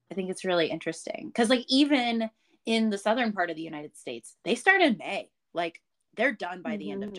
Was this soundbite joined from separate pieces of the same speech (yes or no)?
no